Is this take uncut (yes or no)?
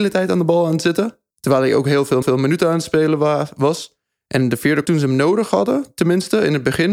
no